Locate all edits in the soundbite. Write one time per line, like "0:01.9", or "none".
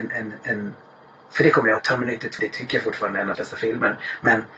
0:01.8
0:02.4
0:03.3